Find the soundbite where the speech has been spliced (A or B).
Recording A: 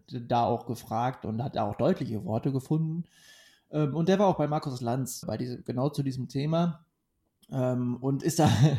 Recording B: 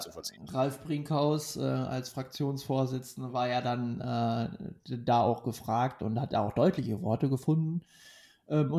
A